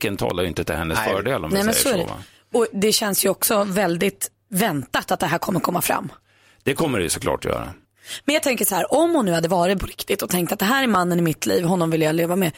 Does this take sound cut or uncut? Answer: cut